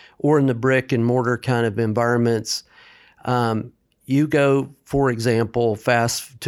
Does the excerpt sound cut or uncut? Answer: uncut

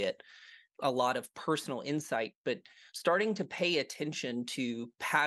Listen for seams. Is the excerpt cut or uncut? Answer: uncut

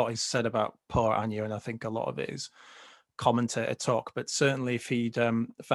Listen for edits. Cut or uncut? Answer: uncut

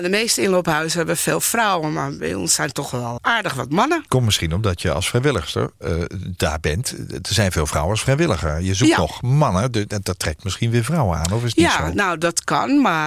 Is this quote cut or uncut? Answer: cut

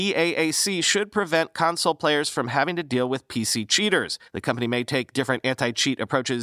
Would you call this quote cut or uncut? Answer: cut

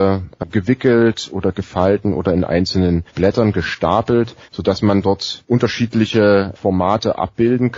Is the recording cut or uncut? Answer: cut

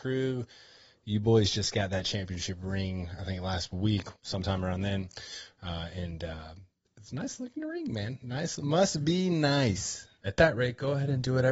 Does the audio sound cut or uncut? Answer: cut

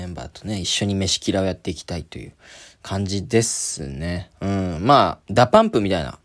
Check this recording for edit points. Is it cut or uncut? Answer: uncut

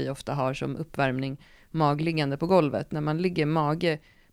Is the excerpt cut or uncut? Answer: uncut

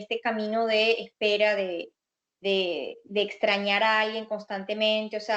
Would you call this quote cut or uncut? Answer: uncut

